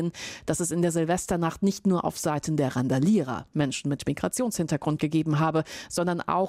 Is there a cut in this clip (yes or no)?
no